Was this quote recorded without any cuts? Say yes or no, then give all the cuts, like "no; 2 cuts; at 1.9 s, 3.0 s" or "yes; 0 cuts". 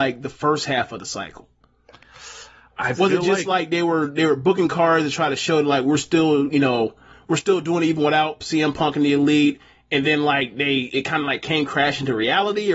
yes; 0 cuts